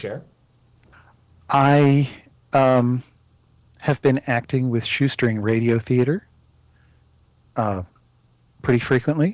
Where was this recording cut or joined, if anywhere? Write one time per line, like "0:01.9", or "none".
none